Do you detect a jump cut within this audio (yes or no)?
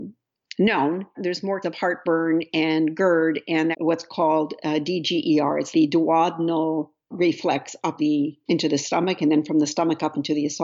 yes